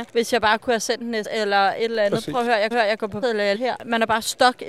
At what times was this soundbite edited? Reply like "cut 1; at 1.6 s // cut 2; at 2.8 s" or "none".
cut 1; at 1.2 s // cut 2; at 2.7 s // cut 3; at 3.2 s // cut 4; at 3.5 s